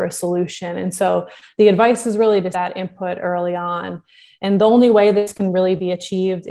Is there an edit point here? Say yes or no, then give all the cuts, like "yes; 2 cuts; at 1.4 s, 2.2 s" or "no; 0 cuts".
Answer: yes; 1 cut; at 2.5 s